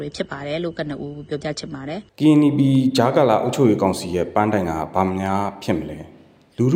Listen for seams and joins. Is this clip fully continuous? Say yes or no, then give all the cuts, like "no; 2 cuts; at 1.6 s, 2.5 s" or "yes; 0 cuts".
no; 1 cut; at 2.1 s